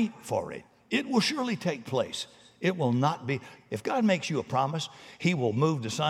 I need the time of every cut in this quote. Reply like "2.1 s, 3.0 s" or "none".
none

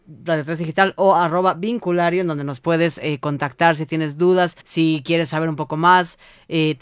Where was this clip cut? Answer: 4.6 s

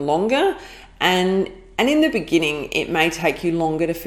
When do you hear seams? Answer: none

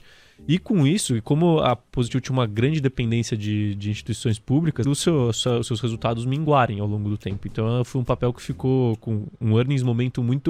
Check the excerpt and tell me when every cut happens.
4.8 s

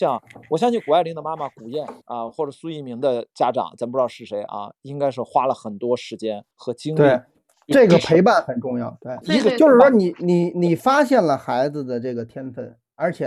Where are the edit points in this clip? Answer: 2.0 s, 6.5 s, 9.2 s

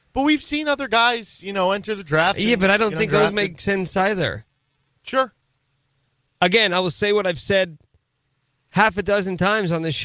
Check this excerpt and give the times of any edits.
none

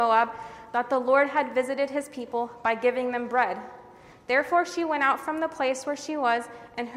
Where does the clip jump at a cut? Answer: none

